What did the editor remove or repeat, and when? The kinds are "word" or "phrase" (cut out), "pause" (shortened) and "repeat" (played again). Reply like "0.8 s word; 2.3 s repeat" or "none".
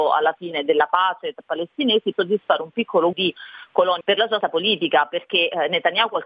1.4 s word; 2.1 s word; 3.1 s word; 4.0 s word; 4.4 s word